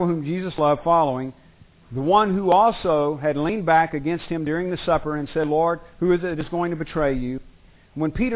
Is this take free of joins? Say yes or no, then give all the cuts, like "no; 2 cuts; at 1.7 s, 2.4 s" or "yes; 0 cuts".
yes; 0 cuts